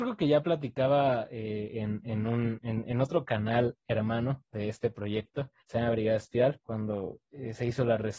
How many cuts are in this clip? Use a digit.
1